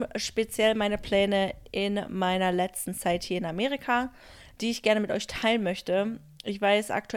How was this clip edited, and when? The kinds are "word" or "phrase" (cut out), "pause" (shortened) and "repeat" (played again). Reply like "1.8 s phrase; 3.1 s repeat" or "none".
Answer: none